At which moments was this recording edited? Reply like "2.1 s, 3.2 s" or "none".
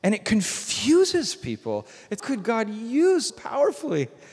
2.2 s, 3.3 s